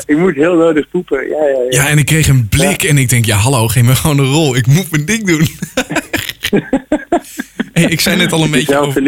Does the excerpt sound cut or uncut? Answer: uncut